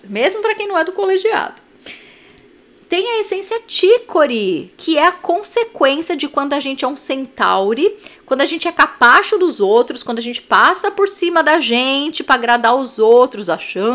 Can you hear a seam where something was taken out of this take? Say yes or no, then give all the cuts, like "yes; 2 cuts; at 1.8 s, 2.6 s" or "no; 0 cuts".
no; 0 cuts